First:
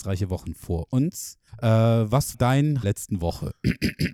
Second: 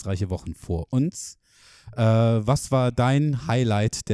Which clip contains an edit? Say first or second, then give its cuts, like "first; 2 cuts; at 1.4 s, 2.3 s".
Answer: first; 3 cuts; at 1.5 s, 2.3 s, 2.8 s